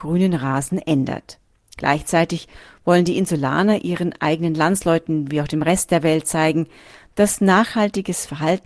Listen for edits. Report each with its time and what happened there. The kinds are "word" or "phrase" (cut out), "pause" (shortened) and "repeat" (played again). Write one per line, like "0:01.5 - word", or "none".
none

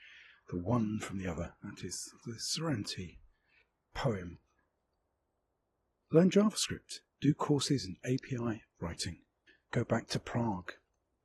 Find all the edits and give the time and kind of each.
0:02.2 - word

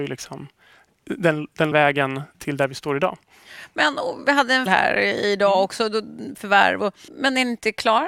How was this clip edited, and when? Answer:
0:01.7 - word
0:02.3 - word
0:04.7 - word
0:06.3 - word
0:07.1 - word

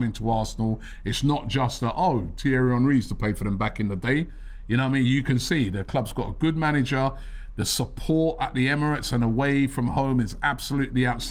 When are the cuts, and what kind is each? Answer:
none

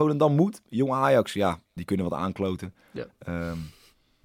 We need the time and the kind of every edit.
0:01.8 - word

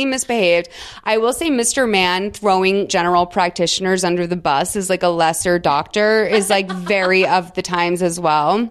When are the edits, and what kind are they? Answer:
0:02.9 - word

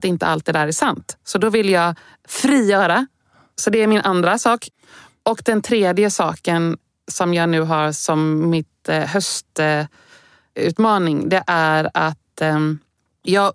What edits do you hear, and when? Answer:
none

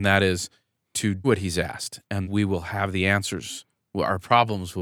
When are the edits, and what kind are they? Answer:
0:01.2 - word
0:02.2 - word

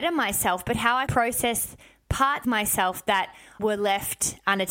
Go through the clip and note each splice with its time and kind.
0:01.1 - word
0:02.4 - word
0:03.6 - word

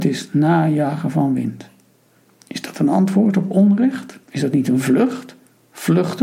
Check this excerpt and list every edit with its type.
0:02.2 - pause
0:04.2 - pause

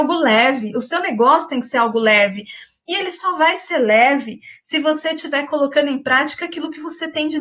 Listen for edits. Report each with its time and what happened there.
none

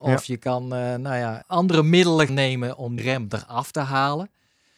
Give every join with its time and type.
0:01.4 - word
0:02.3 - word
0:03.0 - word

